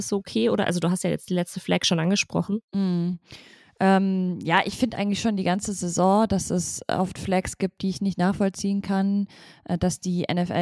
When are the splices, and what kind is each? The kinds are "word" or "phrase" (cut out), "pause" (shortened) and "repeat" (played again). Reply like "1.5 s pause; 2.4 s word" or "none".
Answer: 2.6 s pause